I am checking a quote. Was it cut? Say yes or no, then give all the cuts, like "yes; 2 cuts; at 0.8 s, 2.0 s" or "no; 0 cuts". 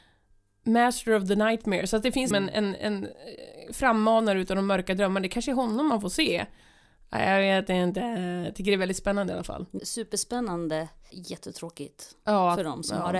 yes; 3 cuts; at 2.3 s, 9.8 s, 11.1 s